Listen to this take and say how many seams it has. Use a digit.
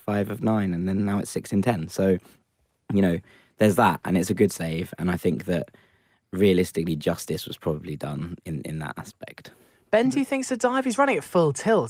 0